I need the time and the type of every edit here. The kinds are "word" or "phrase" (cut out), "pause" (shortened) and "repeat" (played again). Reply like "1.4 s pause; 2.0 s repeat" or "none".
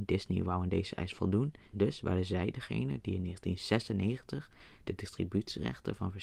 1.7 s word